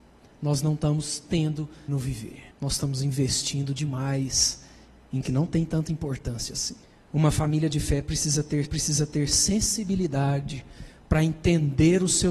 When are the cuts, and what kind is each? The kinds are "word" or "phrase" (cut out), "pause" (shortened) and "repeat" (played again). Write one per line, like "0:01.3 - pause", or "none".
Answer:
0:01.9 - word
0:02.5 - pause
0:05.2 - word
0:06.8 - pause
0:08.6 - repeat